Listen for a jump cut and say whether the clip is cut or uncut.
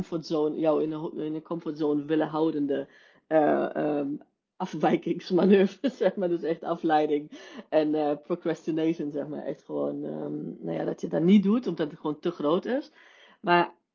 uncut